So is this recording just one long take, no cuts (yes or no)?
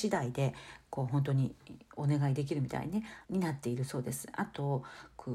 no